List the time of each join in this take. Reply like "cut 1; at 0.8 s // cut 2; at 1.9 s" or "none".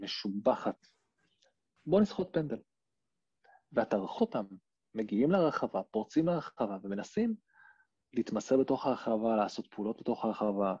cut 1; at 4.2 s